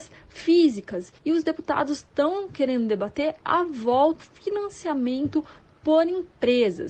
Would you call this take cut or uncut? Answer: cut